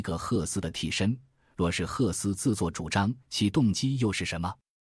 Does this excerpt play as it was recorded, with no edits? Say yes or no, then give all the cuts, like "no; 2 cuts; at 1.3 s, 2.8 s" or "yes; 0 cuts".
no; 1 cut; at 3.2 s